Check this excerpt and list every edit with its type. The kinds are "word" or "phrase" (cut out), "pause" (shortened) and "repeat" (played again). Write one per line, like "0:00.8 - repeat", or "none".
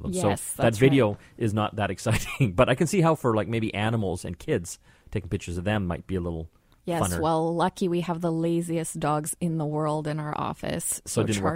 none